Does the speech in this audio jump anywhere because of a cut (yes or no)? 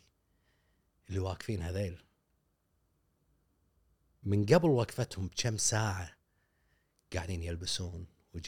no